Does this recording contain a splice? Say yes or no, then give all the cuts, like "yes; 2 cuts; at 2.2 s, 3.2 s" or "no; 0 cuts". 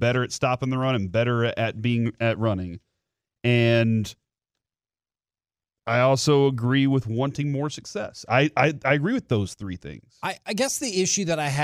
no; 0 cuts